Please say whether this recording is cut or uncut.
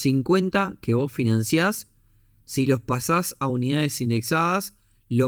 uncut